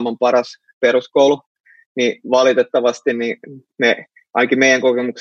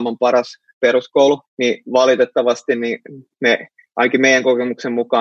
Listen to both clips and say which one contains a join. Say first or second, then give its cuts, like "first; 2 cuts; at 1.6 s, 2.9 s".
second; 1 cut; at 1.5 s